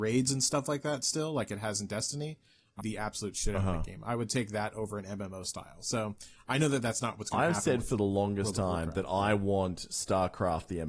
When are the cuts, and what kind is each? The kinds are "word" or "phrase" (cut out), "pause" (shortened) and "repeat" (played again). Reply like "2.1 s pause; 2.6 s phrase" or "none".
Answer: 2.8 s phrase